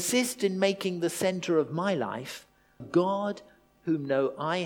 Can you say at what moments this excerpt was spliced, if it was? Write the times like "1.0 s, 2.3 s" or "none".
2.8 s